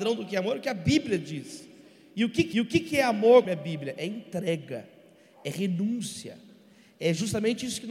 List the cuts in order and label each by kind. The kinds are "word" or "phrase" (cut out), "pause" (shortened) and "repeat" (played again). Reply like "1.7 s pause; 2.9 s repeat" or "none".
2.5 s repeat; 3.5 s word